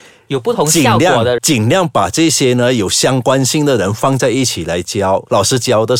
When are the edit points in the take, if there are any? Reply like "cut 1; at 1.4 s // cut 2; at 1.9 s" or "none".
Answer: cut 1; at 1.4 s